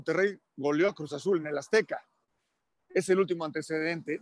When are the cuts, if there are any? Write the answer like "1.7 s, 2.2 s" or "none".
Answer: none